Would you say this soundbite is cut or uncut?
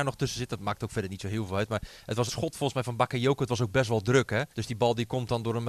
cut